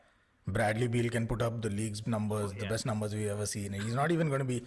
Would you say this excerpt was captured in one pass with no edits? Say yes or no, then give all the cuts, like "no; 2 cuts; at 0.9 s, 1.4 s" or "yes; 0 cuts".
no; 1 cut; at 2.0 s